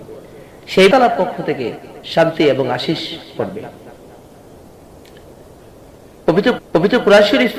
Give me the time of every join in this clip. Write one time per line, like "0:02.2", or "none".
0:00.9
0:02.0
0:03.4
0:06.6